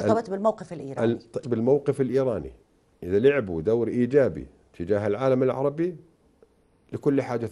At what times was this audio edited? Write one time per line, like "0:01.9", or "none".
0:01.4